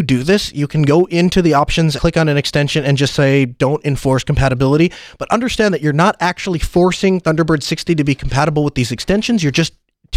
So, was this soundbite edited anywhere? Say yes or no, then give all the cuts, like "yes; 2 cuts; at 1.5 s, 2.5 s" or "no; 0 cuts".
yes; 1 cut; at 2.0 s